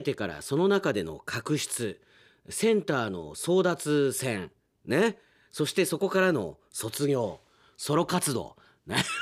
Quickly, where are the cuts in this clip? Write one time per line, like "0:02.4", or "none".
none